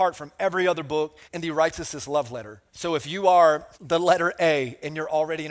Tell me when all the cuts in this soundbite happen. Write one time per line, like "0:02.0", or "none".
0:01.2
0:02.7
0:03.7